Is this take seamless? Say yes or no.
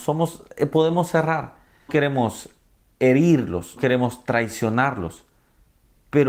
no